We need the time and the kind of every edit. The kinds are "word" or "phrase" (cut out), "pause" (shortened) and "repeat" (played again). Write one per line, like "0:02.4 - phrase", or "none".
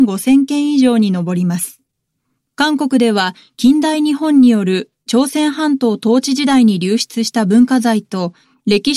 none